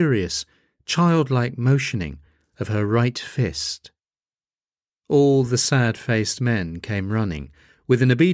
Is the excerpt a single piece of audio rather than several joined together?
yes; 0 cuts

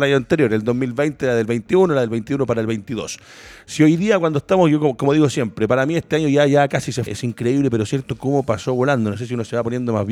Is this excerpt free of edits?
no; 1 cut; at 7.1 s

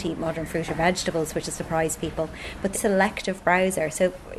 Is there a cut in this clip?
yes; 2 cuts; at 1.4 s, 2.7 s

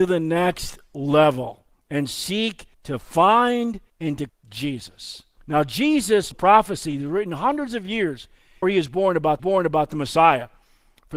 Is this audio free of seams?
no; 8 cuts; at 1.7 s, 2.7 s, 3.9 s, 4.3 s, 5.4 s, 6.3 s, 8.6 s, 9.4 s

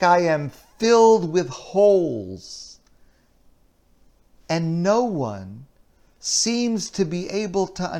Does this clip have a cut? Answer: no; 0 cuts

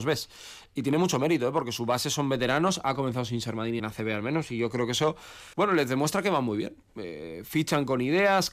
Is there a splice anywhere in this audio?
yes; 2 cuts; at 3.8 s, 5.5 s

